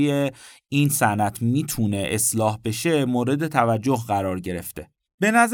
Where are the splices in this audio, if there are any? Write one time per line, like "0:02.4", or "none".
none